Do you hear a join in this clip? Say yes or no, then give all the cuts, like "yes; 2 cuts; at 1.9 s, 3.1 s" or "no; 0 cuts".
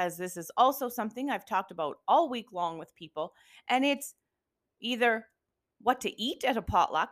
no; 0 cuts